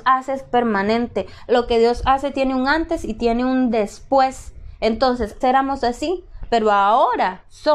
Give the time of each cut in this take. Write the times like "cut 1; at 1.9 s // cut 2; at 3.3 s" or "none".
cut 1; at 5.4 s